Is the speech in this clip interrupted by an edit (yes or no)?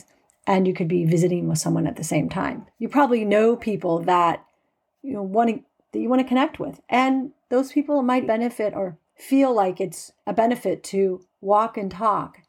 yes